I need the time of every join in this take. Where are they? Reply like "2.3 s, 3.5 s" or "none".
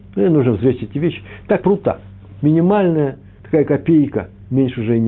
1.6 s